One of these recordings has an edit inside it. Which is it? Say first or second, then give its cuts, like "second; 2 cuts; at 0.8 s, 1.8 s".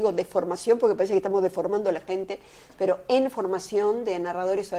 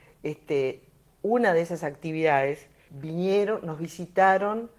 second; 1 cut; at 2.9 s